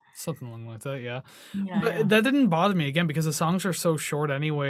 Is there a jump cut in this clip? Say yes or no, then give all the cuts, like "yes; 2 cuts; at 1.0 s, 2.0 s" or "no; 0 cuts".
no; 0 cuts